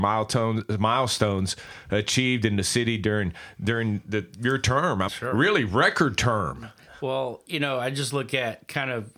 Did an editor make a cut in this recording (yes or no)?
yes